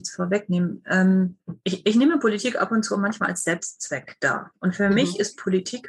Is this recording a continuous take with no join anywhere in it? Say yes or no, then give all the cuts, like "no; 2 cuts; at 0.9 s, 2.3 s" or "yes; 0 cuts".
no; 1 cut; at 1.6 s